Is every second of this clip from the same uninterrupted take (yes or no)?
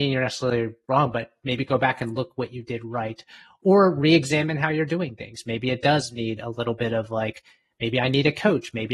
yes